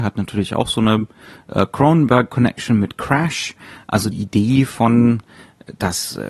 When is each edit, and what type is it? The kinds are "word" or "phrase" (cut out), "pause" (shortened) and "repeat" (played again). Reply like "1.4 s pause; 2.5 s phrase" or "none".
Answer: 4.1 s word